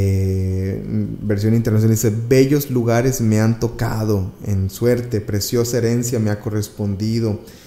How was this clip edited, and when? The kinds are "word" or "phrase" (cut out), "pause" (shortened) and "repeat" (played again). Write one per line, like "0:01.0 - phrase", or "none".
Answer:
none